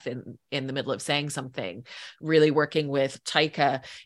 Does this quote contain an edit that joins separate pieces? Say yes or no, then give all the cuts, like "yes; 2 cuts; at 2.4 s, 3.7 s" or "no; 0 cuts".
no; 0 cuts